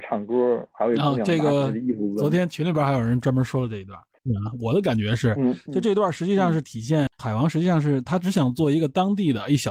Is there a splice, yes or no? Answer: yes